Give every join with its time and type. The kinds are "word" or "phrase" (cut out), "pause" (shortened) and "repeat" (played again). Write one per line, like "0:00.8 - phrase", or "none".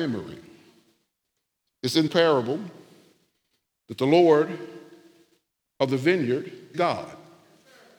0:02.1 - word
0:06.7 - word